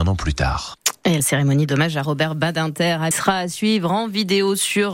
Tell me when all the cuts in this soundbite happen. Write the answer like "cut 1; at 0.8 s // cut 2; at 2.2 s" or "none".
cut 1; at 1.2 s // cut 2; at 3.1 s